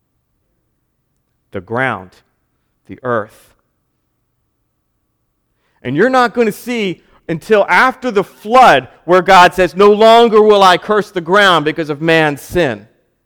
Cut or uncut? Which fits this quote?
uncut